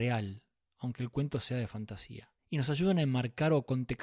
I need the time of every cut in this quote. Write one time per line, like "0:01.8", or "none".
0:02.4